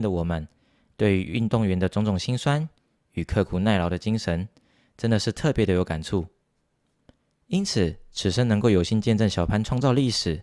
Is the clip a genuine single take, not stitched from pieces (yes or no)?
yes